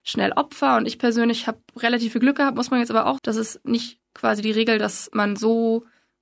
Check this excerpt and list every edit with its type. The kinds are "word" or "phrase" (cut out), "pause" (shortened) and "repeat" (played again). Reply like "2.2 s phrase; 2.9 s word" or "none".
3.2 s word; 4.0 s pause

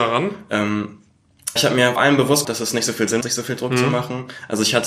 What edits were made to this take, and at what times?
1.6 s word; 2.0 s word; 2.4 s word; 3.2 s word

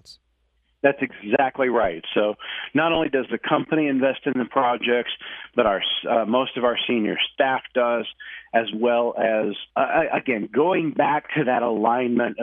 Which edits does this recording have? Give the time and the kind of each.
9.7 s pause

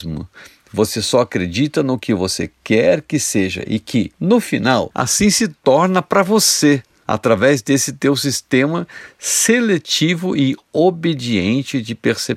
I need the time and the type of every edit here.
none

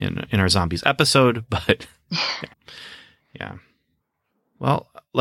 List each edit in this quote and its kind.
2.5 s pause

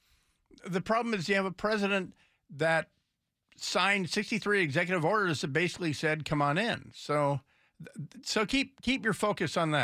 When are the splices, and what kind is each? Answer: none

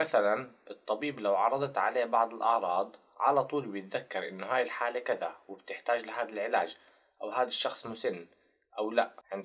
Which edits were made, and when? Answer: none

